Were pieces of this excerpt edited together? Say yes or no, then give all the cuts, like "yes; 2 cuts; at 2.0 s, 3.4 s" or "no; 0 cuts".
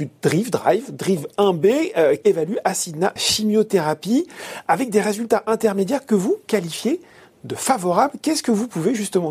yes; 2 cuts; at 2.2 s, 3.2 s